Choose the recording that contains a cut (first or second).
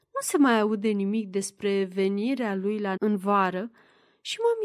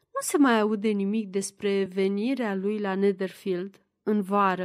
first